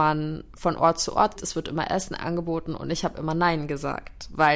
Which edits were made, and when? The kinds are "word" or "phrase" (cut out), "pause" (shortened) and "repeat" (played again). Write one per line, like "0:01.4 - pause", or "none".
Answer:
0:01.4 - word